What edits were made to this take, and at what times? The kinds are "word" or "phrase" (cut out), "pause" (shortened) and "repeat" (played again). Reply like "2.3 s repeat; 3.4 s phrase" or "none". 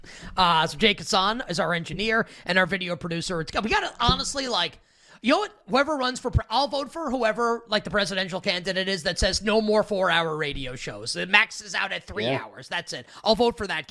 none